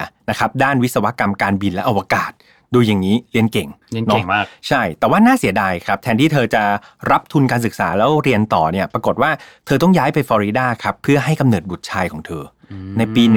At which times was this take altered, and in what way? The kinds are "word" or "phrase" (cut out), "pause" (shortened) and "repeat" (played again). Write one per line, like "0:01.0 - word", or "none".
none